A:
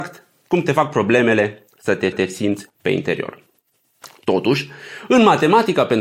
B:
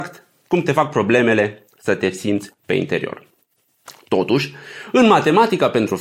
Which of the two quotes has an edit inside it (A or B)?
A